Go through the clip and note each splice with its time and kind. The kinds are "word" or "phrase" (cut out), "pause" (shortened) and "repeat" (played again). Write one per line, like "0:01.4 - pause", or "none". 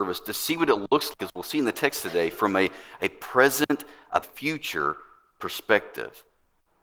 0:01.2 - word
0:04.2 - phrase